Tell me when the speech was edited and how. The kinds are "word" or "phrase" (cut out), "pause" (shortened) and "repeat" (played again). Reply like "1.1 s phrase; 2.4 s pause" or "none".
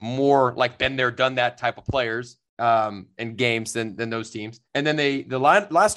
4.6 s pause